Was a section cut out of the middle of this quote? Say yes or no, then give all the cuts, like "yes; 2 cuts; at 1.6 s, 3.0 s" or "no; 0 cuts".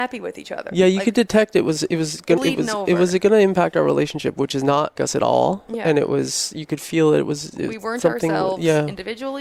yes; 2 cuts; at 2.4 s, 5.0 s